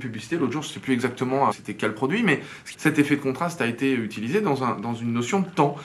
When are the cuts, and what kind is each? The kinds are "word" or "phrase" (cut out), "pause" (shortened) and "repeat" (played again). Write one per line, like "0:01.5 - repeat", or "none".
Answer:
0:01.5 - word
0:02.7 - phrase